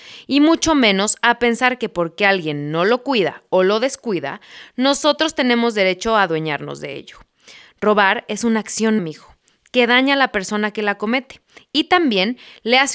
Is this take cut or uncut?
cut